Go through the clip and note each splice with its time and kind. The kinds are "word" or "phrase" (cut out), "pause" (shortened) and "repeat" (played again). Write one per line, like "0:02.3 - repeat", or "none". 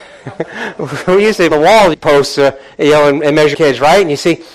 0:01.5 - phrase
0:01.9 - phrase
0:03.5 - word